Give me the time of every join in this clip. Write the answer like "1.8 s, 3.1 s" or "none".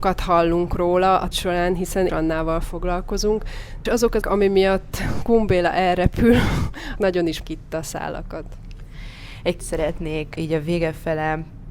1.3 s, 2.1 s, 3.9 s, 4.2 s, 7.0 s, 7.4 s, 9.6 s, 10.4 s